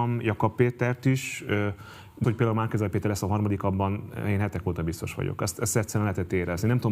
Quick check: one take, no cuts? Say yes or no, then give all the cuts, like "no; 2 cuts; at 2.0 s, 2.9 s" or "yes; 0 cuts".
no; 1 cut; at 2.2 s